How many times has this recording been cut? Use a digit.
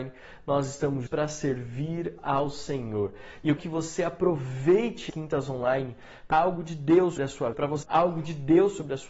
7